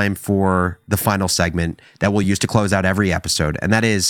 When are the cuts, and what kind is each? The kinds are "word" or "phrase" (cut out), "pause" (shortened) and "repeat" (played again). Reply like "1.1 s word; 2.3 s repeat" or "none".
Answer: none

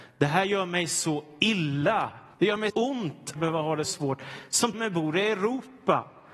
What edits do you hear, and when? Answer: 2.3 s pause; 2.7 s word; 3.4 s phrase; 3.8 s word; 4.7 s word

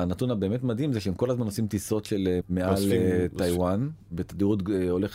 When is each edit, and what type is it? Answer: 2.4 s phrase

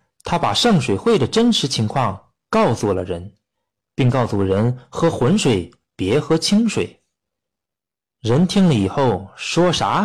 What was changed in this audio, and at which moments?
none

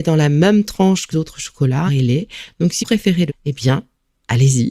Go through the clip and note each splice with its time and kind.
1.1 s word; 1.9 s word; 2.8 s word; 3.3 s word

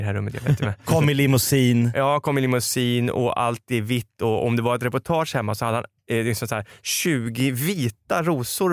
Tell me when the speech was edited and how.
none

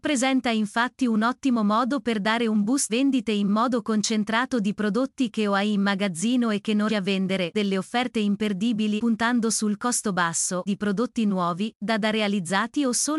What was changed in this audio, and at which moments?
2.9 s word; 6.9 s word; 7.5 s word; 9.0 s word; 10.7 s word

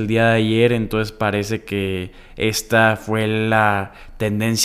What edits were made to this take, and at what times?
none

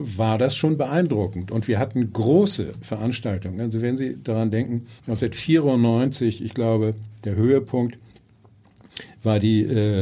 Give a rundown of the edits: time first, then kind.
5.0 s pause

